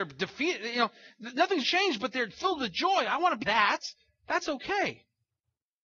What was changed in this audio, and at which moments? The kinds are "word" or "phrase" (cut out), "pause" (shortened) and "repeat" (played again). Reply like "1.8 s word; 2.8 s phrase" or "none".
1.6 s word; 3.4 s word